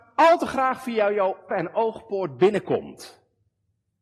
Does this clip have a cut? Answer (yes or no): yes